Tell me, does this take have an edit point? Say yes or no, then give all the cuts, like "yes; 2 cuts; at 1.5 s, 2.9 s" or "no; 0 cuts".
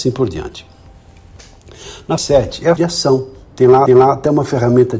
yes; 3 cuts; at 2.2 s, 2.8 s, 3.9 s